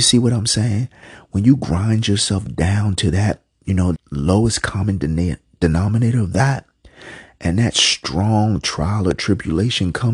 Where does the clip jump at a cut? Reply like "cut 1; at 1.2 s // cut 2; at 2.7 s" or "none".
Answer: cut 1; at 3.9 s